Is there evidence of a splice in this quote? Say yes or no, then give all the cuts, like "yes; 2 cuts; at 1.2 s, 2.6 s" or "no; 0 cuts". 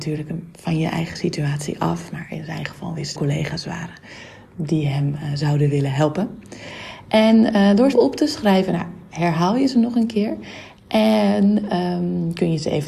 yes; 2 cuts; at 3.2 s, 7.9 s